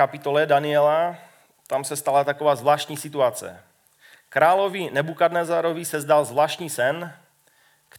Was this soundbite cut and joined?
no; 0 cuts

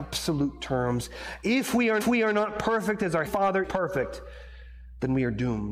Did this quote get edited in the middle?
yes; 3 cuts; at 2.0 s, 3.3 s, 3.6 s

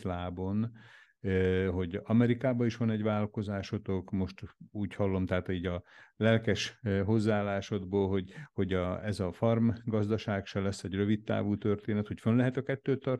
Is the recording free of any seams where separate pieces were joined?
yes; 0 cuts

